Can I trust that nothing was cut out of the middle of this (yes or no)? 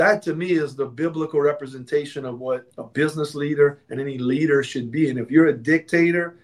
no